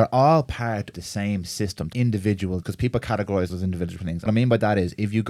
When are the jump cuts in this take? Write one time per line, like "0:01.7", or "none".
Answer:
0:00.9
0:01.9
0:02.6
0:03.5
0:04.3